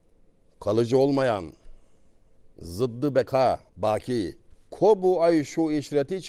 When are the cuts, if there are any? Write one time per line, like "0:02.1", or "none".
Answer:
0:02.5
0:03.7